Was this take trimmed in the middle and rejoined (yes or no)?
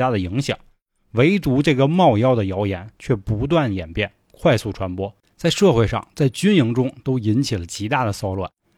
no